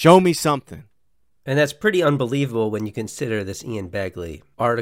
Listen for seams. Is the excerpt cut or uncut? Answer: uncut